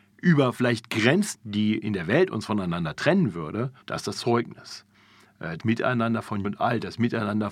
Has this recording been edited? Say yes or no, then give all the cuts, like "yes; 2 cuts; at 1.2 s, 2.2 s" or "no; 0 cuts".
yes; 5 cuts; at 1.3 s, 3.8 s, 4.1 s, 5.6 s, 6.4 s